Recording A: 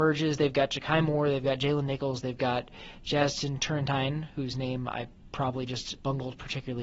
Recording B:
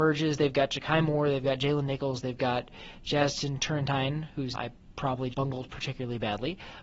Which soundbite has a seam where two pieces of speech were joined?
B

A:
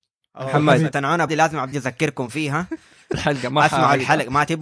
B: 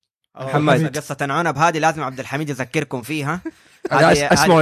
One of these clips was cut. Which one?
A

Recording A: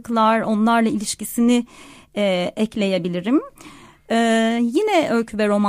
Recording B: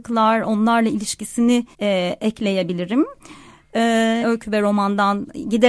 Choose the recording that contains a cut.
B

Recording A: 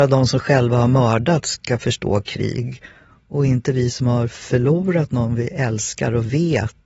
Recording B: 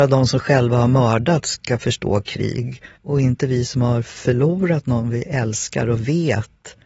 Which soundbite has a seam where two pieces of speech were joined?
B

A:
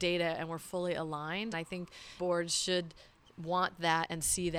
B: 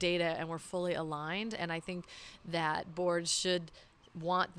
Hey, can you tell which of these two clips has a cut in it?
A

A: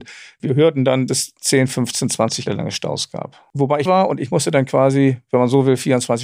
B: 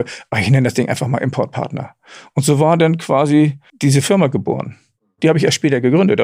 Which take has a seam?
A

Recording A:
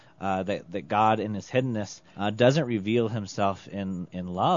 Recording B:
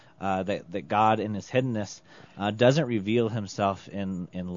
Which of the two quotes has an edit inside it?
A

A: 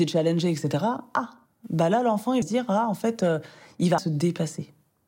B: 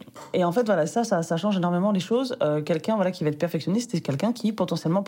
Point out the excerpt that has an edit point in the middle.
A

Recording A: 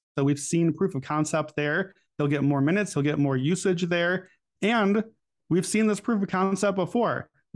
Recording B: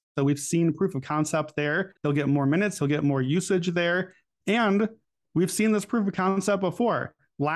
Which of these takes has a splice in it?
B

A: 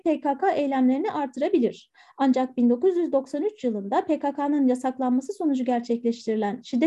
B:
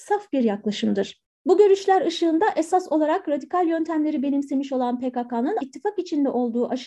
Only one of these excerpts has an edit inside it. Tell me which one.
B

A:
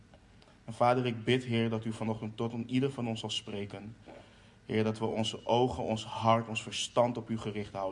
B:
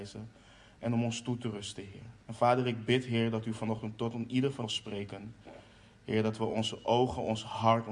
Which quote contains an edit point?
B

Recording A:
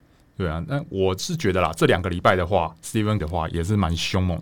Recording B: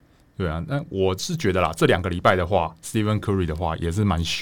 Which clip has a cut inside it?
A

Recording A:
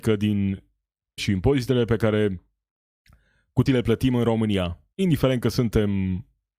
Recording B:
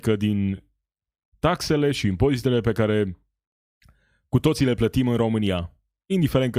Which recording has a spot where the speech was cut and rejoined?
A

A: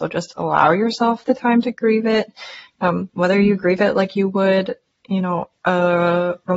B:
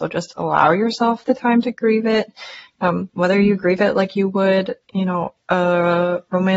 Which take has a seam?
B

